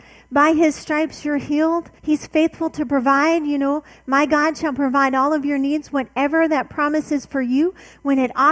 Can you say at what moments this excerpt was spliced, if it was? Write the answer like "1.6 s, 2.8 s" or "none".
2.0 s